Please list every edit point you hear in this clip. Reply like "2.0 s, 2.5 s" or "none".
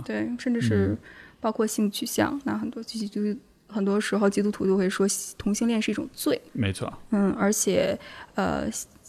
6.5 s